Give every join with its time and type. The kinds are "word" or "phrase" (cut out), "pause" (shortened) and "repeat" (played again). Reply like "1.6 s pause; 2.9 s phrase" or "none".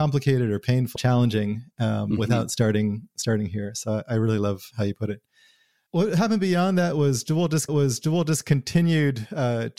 1.0 s phrase; 7.7 s repeat